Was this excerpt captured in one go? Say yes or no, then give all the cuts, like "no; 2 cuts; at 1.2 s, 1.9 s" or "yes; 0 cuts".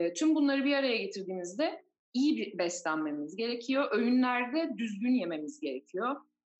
yes; 0 cuts